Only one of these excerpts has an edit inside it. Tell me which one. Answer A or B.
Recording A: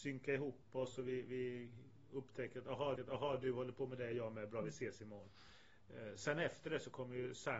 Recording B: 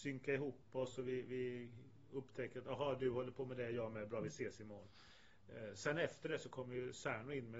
A